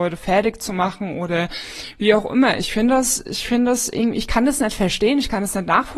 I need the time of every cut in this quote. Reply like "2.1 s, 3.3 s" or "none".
none